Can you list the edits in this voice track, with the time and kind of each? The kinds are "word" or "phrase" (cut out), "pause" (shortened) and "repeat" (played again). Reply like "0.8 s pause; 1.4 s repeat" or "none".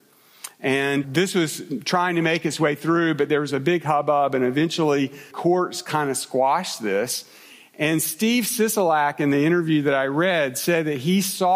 1.0 s word; 5.3 s word